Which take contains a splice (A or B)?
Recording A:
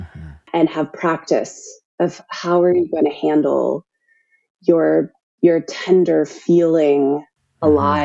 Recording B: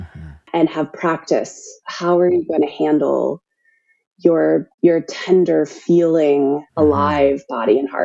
B